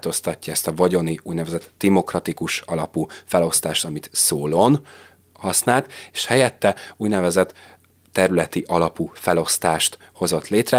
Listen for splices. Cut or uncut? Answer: uncut